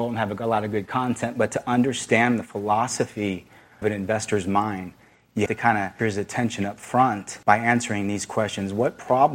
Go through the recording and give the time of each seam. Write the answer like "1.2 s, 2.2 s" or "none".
3.8 s, 5.5 s, 6.0 s, 7.4 s